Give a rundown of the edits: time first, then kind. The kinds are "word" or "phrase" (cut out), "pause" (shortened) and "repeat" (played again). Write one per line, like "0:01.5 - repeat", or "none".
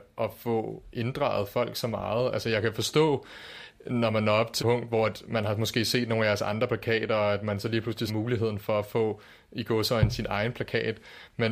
0:04.6 - word
0:08.1 - word